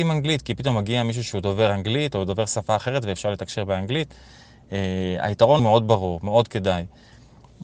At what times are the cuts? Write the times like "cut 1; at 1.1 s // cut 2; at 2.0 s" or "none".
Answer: cut 1; at 5.6 s